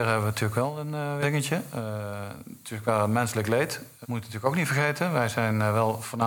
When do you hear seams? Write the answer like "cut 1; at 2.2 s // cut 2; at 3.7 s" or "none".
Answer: cut 1; at 1.2 s // cut 2; at 4.0 s